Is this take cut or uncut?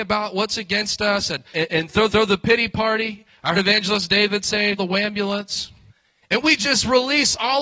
cut